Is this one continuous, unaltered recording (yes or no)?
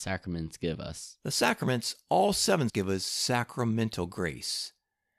no